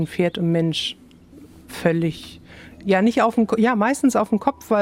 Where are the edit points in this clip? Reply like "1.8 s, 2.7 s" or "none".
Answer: none